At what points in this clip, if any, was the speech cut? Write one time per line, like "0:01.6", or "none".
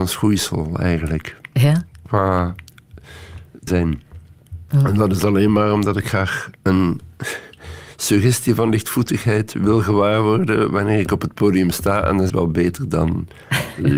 0:03.7
0:06.6
0:12.3